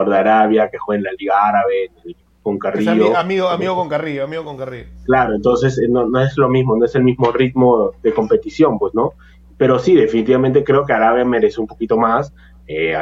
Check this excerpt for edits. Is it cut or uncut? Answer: uncut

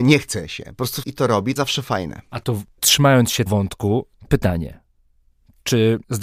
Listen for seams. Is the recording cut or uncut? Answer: cut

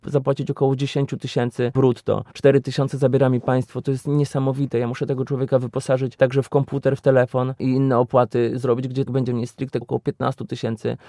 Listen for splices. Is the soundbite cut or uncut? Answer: cut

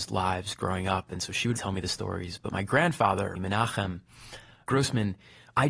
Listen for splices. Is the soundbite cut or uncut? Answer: cut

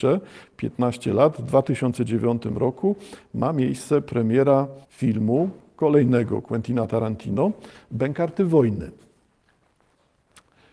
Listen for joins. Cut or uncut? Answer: cut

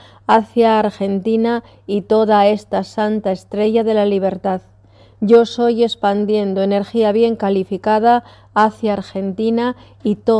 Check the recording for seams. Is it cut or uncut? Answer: uncut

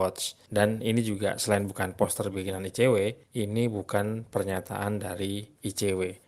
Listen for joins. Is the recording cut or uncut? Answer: uncut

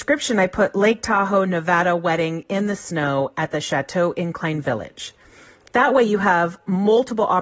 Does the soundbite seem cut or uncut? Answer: uncut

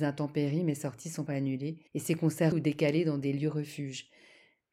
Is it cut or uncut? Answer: cut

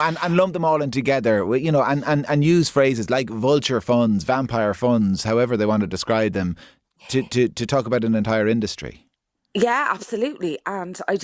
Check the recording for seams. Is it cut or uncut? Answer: uncut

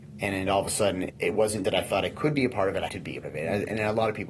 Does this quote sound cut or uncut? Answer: cut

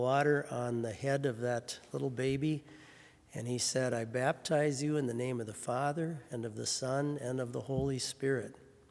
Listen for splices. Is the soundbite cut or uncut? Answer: uncut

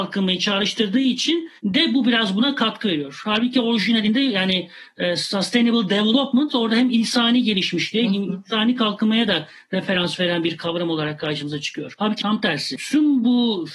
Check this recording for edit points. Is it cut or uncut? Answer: cut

